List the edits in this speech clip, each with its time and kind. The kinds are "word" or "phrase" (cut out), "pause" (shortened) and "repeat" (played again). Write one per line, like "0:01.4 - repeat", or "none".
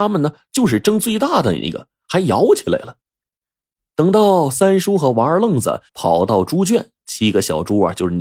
0:03.1 - pause
0:05.9 - pause

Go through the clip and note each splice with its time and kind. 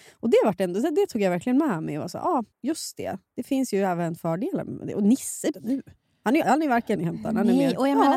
0:02.5 - pause
0:05.5 - phrase
0:06.4 - word
0:07.0 - phrase

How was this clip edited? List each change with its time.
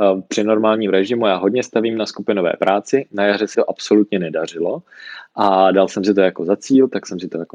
0:03.5 - word

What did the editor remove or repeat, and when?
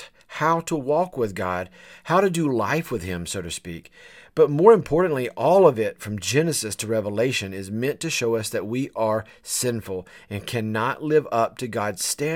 none

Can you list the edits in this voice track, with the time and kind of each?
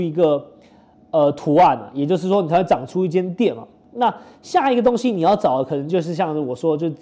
none

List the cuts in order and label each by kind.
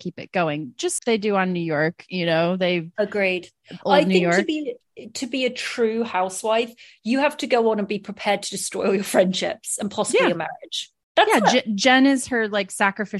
0:01.0 - word

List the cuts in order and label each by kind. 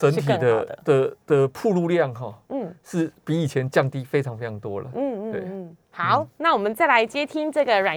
0:01.2 - pause
0:05.8 - pause

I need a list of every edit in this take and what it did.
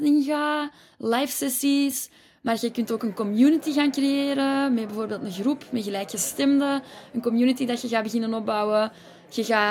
none

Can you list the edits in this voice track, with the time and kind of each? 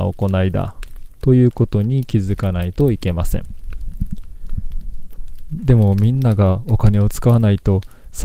0:01.1 - pause

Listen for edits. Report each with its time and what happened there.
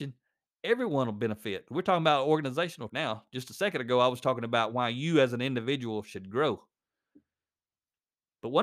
0:02.9 - word

